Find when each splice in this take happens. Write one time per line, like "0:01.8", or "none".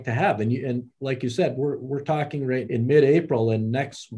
0:02.6